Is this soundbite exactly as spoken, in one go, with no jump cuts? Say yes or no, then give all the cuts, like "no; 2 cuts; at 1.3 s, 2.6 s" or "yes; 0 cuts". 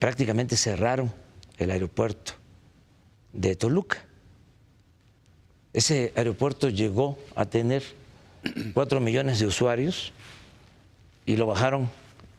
yes; 0 cuts